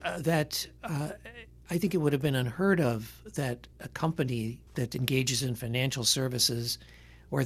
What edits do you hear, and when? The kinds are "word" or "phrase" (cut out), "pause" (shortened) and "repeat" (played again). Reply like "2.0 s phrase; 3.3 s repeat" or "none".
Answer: 3.7 s pause; 4.7 s pause

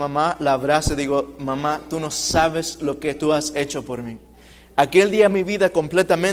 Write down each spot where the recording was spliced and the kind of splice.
5.3 s word

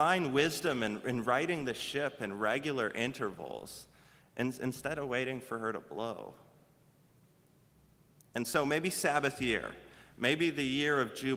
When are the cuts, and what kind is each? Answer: none

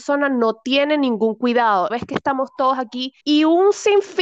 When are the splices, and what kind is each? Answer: 1.9 s word; 3.2 s pause

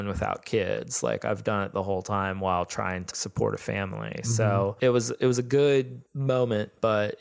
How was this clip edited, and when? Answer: 3.1 s word; 6.1 s pause

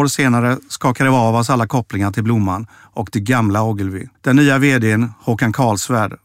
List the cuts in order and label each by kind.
4.1 s pause

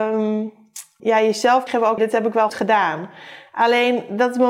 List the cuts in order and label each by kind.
1.0 s word; 1.7 s word; 2.0 s word; 2.5 s word

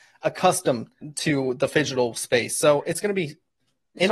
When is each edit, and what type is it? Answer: 1.0 s word

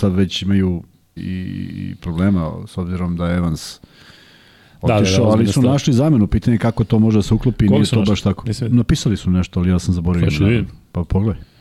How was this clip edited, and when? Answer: 1.2 s word; 2.0 s word

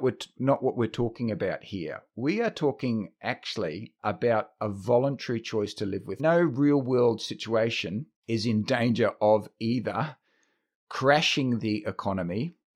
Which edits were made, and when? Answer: 4.0 s word; 6.2 s phrase; 8.2 s pause

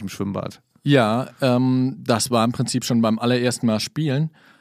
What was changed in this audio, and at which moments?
none

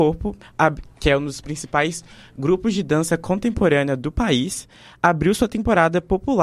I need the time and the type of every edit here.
none

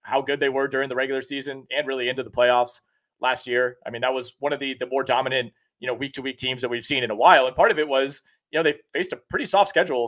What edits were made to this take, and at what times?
none

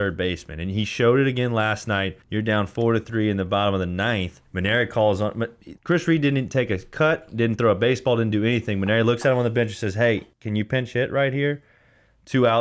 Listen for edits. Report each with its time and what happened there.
2.2 s pause; 4.5 s pause; 5.8 s pause; 10.3 s pause

